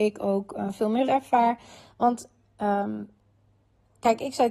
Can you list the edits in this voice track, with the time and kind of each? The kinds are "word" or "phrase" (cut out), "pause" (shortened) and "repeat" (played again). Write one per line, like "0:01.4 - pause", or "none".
0:01.1 - word